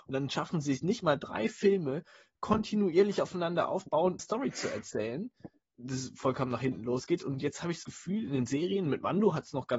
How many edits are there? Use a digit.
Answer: 2